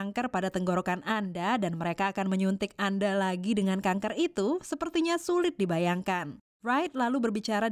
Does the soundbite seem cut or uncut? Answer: uncut